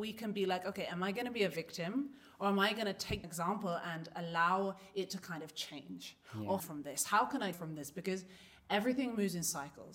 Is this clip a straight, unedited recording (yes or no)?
no